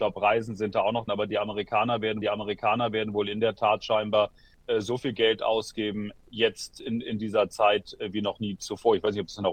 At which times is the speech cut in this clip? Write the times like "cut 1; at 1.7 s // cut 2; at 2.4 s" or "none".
cut 1; at 1.1 s // cut 2; at 2.2 s